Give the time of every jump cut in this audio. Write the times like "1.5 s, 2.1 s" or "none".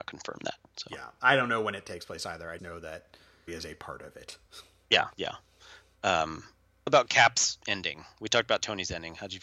2.6 s, 3.5 s, 5.1 s, 6.9 s

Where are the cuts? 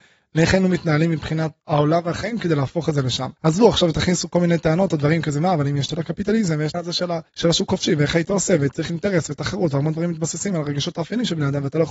1.6 s, 3.4 s, 5.9 s, 6.7 s, 7.3 s, 8.9 s

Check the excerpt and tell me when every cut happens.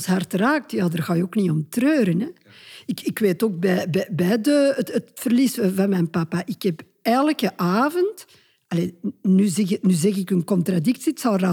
none

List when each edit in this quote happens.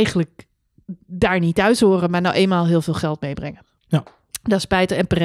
none

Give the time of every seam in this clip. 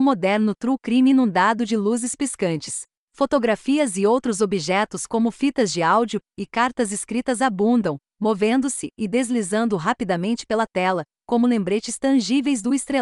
none

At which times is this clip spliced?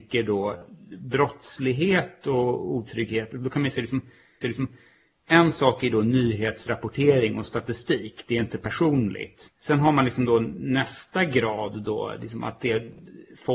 4.4 s, 9.5 s

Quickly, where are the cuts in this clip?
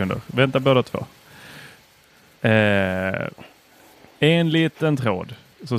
none

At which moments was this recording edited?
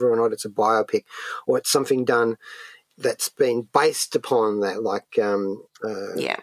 none

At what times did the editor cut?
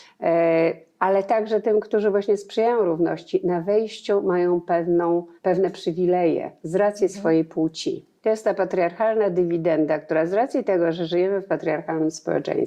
5.4 s, 8.2 s

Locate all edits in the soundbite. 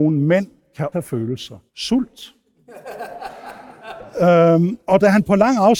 0.9 s, 1.7 s, 4.8 s

